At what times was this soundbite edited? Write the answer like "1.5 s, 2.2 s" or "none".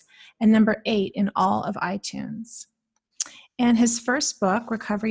none

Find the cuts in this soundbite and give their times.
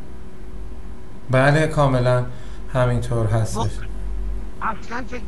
none

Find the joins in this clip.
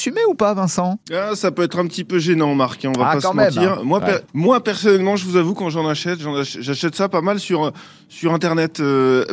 1.0 s, 4.2 s

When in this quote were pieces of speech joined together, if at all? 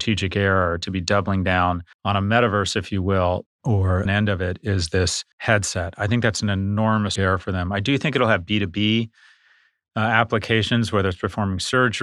1.9 s, 3.5 s, 4.1 s, 5.3 s, 7.2 s

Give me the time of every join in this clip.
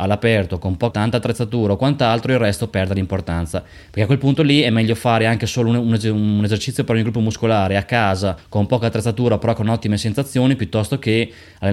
0.9 s, 3.8 s, 8.4 s

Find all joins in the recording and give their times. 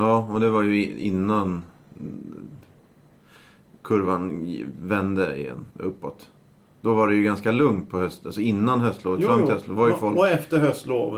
5.7 s

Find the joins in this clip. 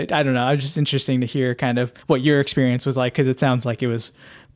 2.0 s

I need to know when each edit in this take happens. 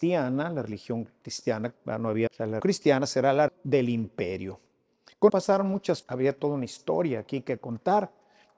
1.7 s, 2.3 s, 2.6 s, 3.5 s, 5.3 s, 6.0 s

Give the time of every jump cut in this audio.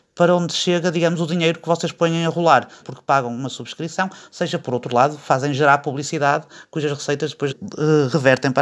2.8 s, 4.6 s, 7.5 s

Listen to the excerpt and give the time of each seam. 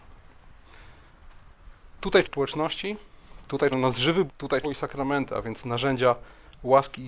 2.2 s, 3.7 s, 4.3 s, 4.6 s

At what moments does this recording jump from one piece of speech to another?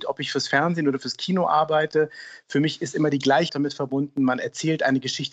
3.5 s

